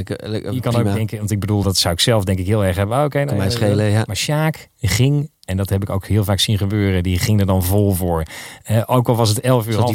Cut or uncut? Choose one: uncut